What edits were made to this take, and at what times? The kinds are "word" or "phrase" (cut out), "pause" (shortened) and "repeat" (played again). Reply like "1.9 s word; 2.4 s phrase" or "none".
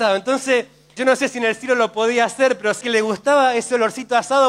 1.0 s word; 2.8 s word

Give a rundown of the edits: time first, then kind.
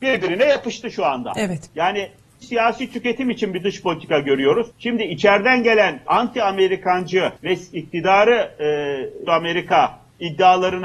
2.4 s word; 4.7 s pause; 6.1 s word; 7.4 s pause; 9.3 s phrase

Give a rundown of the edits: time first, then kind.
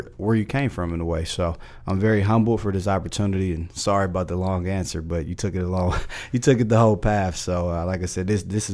none

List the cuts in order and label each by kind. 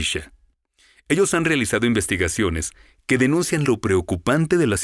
none

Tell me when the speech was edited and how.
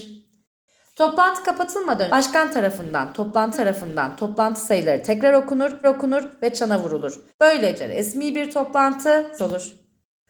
2.1 s word; 3.5 s repeat; 5.8 s repeat; 7.3 s pause; 9.4 s word

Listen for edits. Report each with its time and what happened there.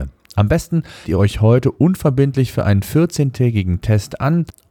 1.0 s word

